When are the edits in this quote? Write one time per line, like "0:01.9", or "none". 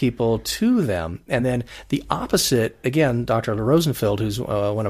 none

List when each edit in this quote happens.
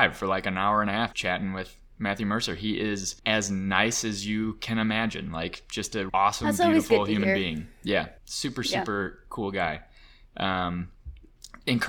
0:01.1
0:03.2
0:06.1
0:08.2

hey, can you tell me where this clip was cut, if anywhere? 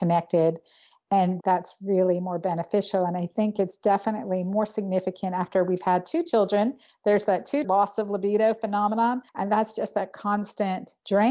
0:01.4
0:07.6
0:09.3

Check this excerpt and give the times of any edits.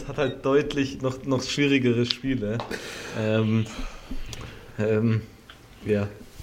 none

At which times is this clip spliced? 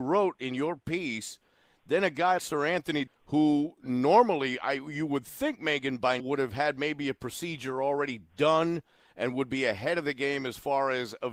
0:02.4
0:03.1
0:06.2

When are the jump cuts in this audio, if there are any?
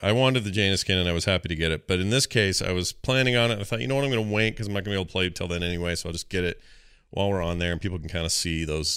none

